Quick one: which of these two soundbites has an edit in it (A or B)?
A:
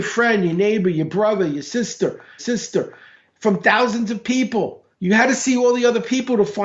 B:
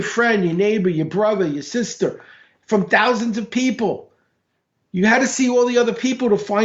A